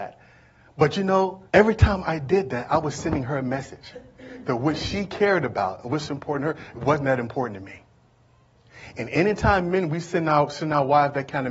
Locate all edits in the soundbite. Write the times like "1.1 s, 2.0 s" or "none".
1.5 s